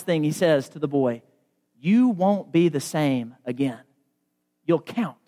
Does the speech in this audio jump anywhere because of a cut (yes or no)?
no